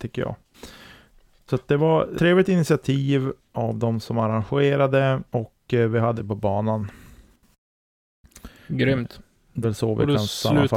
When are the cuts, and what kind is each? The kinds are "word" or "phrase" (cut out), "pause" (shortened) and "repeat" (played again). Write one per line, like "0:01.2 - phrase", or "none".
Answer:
0:02.2 - word
0:03.5 - word
0:05.3 - pause
0:06.2 - phrase
0:09.6 - word